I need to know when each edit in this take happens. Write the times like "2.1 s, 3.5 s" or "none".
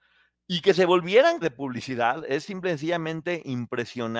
1.4 s